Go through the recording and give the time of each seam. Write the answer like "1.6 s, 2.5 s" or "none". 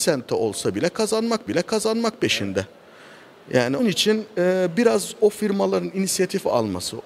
1.5 s, 3.8 s